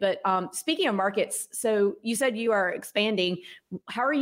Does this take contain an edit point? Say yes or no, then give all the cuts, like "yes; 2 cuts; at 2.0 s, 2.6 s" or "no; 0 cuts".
no; 0 cuts